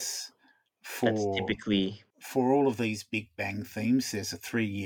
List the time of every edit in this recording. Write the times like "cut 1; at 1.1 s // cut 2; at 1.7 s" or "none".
cut 1; at 2.1 s